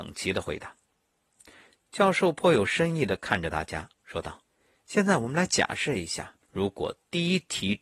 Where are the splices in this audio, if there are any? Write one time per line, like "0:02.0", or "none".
0:03.9
0:04.5
0:06.4